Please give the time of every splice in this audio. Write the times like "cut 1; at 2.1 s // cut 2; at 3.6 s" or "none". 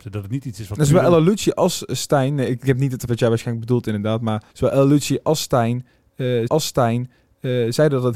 cut 1; at 3.1 s // cut 2; at 4.5 s // cut 3; at 6.5 s